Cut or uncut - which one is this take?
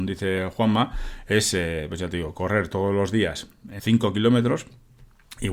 cut